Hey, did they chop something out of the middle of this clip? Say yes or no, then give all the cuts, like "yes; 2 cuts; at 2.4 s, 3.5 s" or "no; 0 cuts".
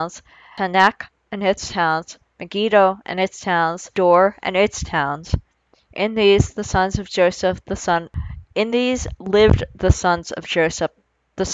no; 0 cuts